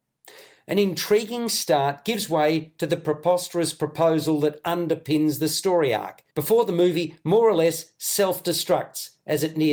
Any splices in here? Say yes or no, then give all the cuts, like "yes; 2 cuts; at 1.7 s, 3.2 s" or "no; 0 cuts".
yes; 1 cut; at 6.3 s